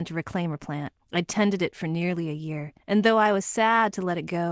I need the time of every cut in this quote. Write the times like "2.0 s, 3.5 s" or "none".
1.0 s, 2.8 s